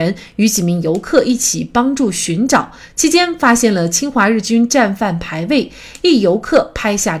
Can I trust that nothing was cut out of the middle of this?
yes; 0 cuts

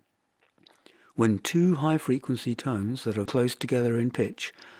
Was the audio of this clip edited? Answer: yes; 1 cut; at 3.2 s

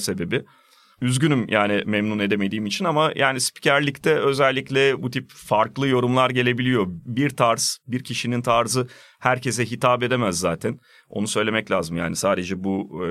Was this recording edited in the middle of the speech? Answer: no; 0 cuts

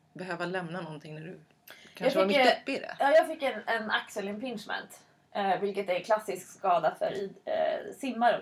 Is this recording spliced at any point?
no; 0 cuts

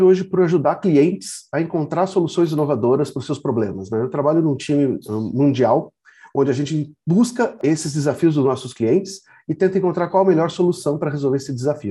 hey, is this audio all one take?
yes; 0 cuts

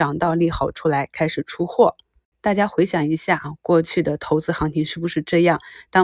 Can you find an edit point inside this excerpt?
no; 0 cuts

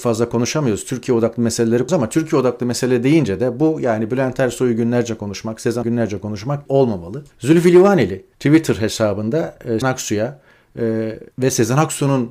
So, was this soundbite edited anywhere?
yes; 7 cuts; at 1.9 s, 5.8 s, 6.7 s, 7.3 s, 8.3 s, 9.8 s, 11.3 s

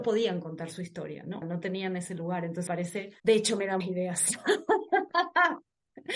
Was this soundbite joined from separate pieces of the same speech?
yes; 4 cuts; at 1.4 s, 2.7 s, 3.2 s, 3.8 s

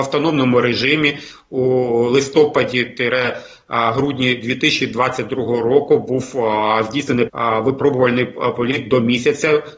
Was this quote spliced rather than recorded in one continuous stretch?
yes; 1 cut; at 7.3 s

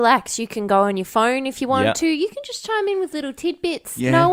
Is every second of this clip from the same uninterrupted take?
yes; 0 cuts

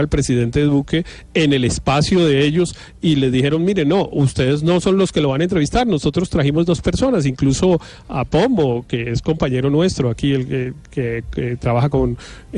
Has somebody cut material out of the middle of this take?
no; 0 cuts

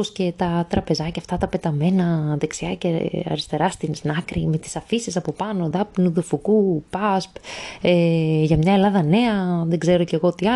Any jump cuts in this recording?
no; 0 cuts

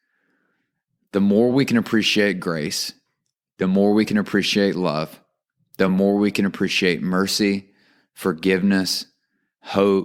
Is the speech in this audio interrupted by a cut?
no; 0 cuts

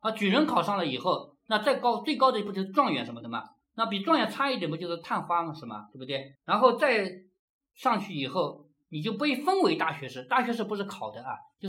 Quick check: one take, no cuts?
no; 1 cut; at 6.3 s

